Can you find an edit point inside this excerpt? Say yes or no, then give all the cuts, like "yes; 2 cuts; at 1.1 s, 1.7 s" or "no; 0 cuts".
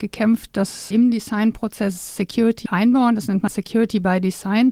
yes; 3 cuts; at 0.9 s, 2.7 s, 3.5 s